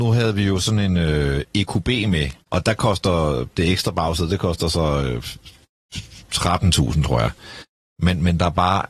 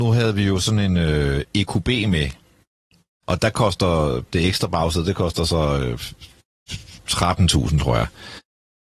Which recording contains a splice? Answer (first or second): first